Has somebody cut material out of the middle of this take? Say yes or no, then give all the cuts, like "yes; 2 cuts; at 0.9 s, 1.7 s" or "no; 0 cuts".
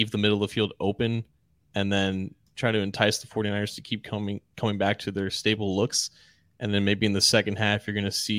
no; 0 cuts